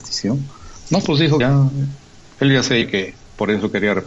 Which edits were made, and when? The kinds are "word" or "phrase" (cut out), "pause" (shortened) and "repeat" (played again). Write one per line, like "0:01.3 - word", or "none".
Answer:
0:01.4 - word
0:02.8 - word